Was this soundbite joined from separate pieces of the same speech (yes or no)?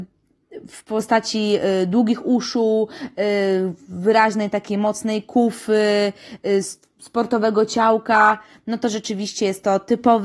no